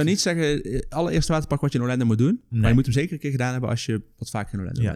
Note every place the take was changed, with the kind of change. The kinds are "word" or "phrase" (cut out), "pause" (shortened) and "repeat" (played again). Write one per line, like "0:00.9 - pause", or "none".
none